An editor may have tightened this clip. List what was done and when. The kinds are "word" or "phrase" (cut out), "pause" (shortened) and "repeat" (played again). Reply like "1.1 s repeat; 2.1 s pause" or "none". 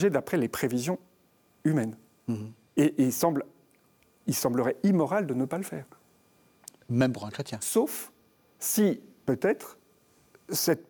none